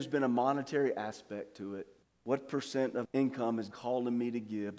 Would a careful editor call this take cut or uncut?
cut